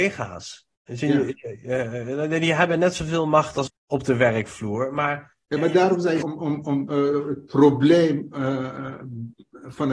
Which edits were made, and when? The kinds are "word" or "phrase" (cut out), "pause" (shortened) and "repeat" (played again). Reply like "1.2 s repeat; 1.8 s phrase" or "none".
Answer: 3.7 s word; 5.4 s pause; 6.2 s word

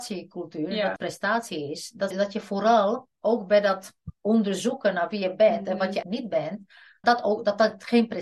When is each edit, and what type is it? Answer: 1.0 s word; 2.1 s word; 3.1 s pause; 6.0 s word; 7.0 s word

